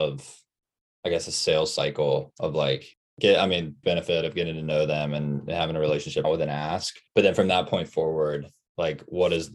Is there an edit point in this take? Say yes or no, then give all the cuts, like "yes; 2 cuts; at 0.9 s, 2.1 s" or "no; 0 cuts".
yes; 4 cuts; at 2.9 s, 3.8 s, 6.2 s, 7.1 s